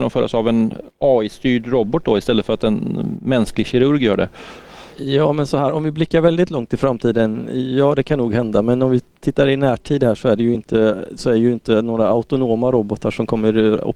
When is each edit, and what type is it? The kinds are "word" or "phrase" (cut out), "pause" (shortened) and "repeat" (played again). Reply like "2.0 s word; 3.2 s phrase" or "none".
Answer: none